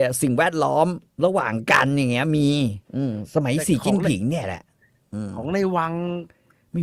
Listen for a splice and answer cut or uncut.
cut